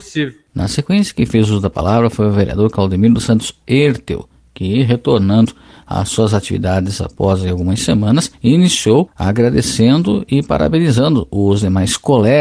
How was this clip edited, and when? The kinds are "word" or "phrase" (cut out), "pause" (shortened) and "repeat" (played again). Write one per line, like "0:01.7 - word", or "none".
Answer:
0:07.0 - word